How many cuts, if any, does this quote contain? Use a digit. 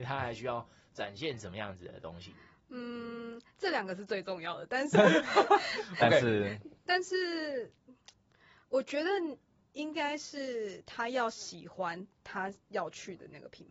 2